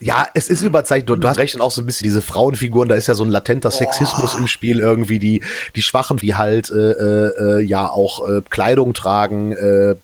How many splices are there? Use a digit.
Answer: 3